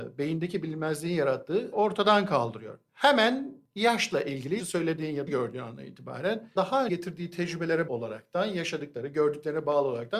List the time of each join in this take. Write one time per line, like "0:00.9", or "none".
0:01.7
0:04.6
0:05.3
0:06.6
0:06.9
0:07.9